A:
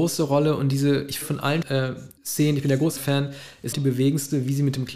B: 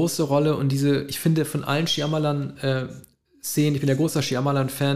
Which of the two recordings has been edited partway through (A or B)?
A